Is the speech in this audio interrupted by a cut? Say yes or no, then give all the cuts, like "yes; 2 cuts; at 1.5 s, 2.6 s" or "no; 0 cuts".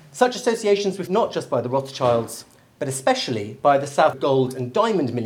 yes; 2 cuts; at 1.1 s, 4.1 s